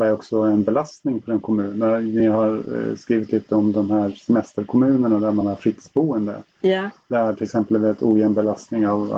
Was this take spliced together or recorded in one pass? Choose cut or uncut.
uncut